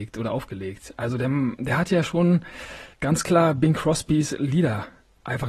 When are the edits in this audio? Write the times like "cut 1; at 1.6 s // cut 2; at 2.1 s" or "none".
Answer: cut 1; at 2.9 s